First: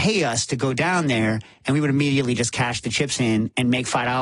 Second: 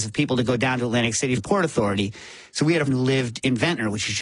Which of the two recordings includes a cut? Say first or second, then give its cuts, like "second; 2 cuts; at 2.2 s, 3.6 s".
second; 2 cuts; at 1.4 s, 2.9 s